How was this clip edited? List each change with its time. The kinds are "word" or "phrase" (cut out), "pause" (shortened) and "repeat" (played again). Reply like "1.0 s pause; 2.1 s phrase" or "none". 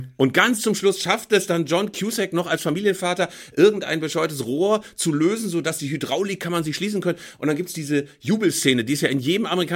none